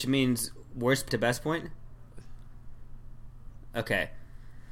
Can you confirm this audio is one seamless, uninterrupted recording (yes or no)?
no